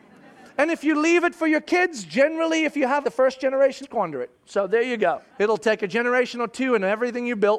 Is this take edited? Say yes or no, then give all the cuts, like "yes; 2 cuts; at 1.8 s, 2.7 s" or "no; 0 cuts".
yes; 3 cuts; at 3.0 s, 3.8 s, 5.3 s